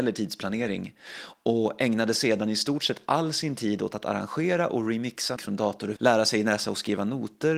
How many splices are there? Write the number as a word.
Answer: two